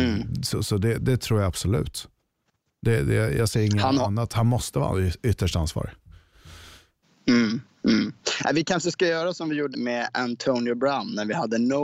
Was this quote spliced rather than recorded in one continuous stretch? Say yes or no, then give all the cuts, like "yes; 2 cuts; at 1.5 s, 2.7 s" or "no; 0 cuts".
yes; 2 cuts; at 1.0 s, 9.7 s